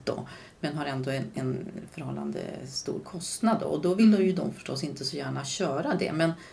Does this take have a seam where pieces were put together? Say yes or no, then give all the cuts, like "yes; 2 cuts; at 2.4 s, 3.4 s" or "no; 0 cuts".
no; 0 cuts